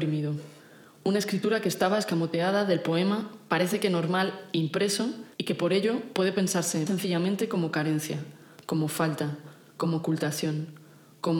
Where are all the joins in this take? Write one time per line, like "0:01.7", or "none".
0:05.3
0:06.9